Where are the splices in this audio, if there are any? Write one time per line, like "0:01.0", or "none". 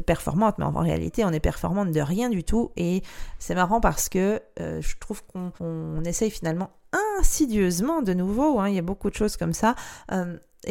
0:05.6